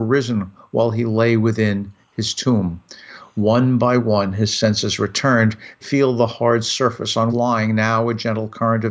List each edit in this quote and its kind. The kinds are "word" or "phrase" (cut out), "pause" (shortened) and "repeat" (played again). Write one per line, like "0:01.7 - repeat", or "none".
0:05.8 - word
0:07.3 - phrase